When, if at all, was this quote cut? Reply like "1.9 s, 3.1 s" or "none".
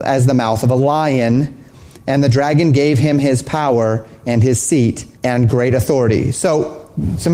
5.1 s